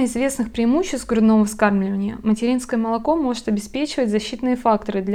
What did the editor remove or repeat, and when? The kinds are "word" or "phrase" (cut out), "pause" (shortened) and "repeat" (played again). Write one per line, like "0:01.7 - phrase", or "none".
none